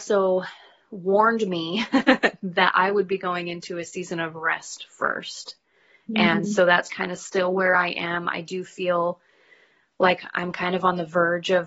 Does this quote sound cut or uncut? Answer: uncut